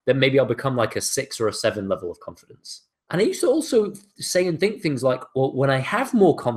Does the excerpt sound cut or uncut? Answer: uncut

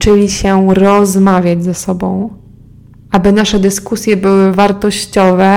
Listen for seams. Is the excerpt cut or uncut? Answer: cut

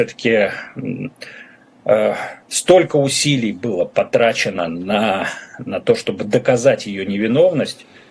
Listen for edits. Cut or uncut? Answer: cut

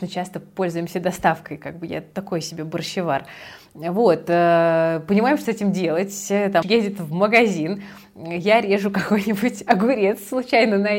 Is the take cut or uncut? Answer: cut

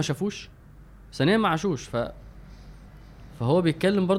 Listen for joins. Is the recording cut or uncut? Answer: uncut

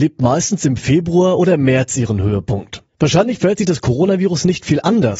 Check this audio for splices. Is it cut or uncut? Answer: cut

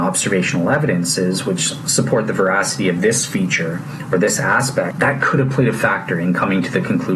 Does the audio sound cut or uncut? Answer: uncut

